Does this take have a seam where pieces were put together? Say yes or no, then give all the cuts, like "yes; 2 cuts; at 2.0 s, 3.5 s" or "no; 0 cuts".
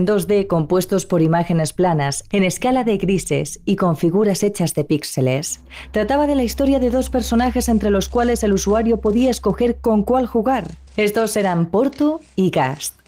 yes; 1 cut; at 10.9 s